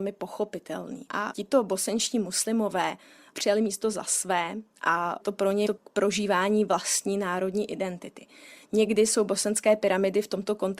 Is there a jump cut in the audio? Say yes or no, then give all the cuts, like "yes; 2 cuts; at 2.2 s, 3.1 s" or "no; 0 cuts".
yes; 2 cuts; at 5.2 s, 5.7 s